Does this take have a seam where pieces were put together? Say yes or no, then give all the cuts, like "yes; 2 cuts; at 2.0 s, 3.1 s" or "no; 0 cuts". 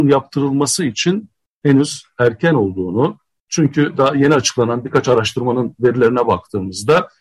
no; 0 cuts